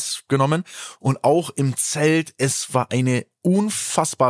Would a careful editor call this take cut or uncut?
uncut